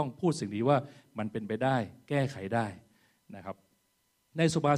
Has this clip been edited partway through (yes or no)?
no